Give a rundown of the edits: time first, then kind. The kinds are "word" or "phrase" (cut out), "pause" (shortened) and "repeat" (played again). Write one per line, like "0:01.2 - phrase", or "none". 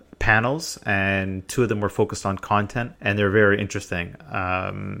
0:03.0 - pause